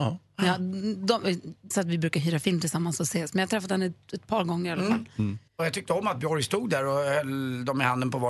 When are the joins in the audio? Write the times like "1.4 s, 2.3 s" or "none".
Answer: 1.7 s, 5.5 s